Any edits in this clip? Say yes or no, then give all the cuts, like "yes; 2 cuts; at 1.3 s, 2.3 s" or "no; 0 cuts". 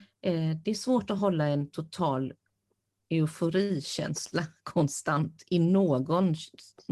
no; 0 cuts